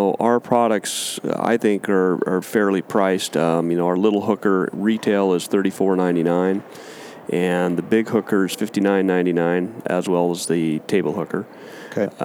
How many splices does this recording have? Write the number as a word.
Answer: two